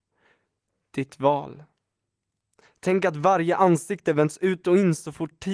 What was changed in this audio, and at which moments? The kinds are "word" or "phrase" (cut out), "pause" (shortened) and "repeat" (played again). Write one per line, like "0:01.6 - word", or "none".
none